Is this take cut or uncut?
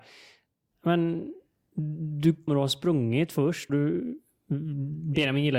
cut